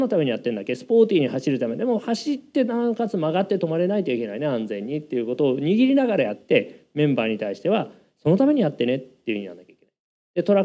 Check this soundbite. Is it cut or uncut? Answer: uncut